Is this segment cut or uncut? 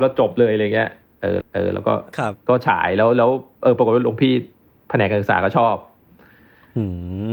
cut